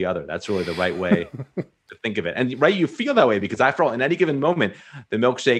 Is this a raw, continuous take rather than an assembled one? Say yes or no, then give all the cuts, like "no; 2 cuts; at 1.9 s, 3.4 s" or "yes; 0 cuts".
yes; 0 cuts